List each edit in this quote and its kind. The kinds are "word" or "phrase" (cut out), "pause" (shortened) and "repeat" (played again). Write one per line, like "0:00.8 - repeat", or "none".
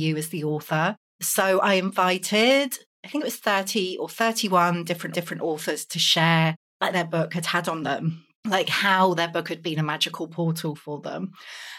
0:05.1 - repeat
0:06.9 - phrase
0:08.3 - pause